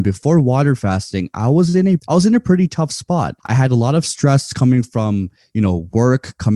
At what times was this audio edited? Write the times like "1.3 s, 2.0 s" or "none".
2.0 s, 3.4 s